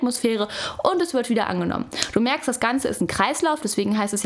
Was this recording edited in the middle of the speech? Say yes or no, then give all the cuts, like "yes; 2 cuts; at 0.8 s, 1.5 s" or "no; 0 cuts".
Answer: no; 0 cuts